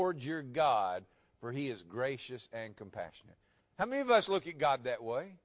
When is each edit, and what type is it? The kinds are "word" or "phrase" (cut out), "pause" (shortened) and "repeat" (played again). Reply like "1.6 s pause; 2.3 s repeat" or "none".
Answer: 3.6 s pause

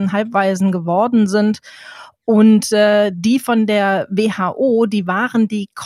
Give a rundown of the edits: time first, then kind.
none

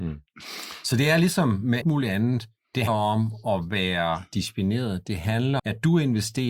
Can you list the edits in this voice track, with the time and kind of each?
1.8 s word; 2.9 s word; 5.6 s word

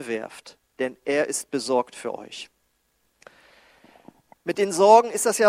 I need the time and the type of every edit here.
none

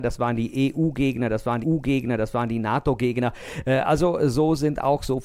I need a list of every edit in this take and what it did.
1.6 s repeat

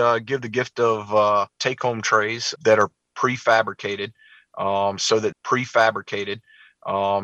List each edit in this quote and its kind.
1.5 s pause; 2.6 s word; 5.3 s repeat

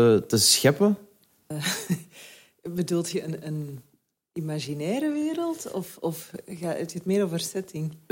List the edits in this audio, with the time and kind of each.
none

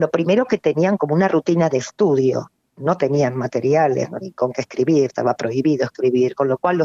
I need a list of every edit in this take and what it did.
1.7 s word; 4.2 s word

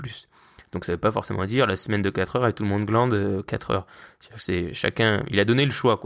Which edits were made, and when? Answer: none

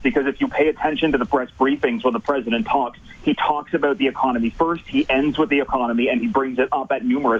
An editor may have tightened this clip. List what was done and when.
none

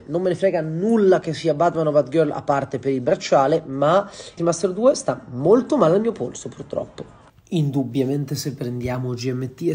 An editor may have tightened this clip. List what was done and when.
4.4 s phrase; 7.3 s pause

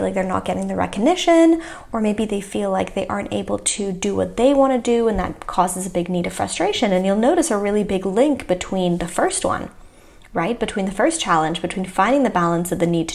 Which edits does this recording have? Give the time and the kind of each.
none

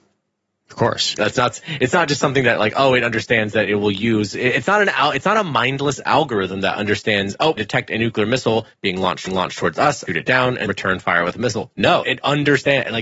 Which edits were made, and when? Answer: 7.6 s phrase; 9.3 s repeat; 10.1 s phrase; 10.7 s word; 12.0 s word

